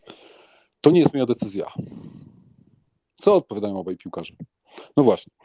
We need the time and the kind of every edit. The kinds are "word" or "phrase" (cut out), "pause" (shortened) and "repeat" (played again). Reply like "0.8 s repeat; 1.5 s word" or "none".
none